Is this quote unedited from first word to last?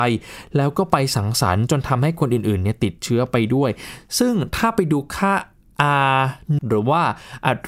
no; 1 cut; at 6.6 s

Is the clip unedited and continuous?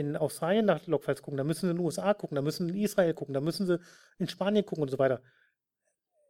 yes; 0 cuts

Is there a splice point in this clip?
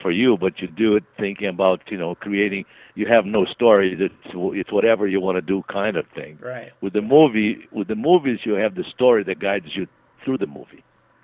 no; 0 cuts

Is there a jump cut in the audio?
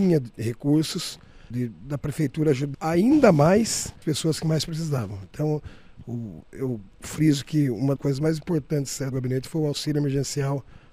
yes; 5 cuts; at 1.5 s, 2.7 s, 4.0 s, 8.0 s, 9.1 s

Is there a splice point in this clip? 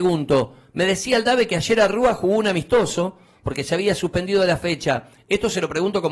no; 0 cuts

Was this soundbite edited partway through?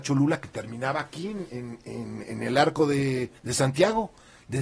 yes; 1 cut; at 3.4 s

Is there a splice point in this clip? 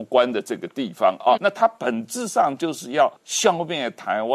yes; 2 cuts; at 1.4 s, 3.2 s

